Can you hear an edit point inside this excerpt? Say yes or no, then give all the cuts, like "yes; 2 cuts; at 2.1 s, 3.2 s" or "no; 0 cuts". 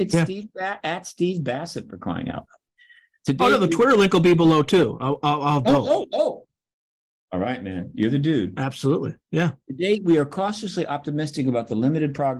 no; 0 cuts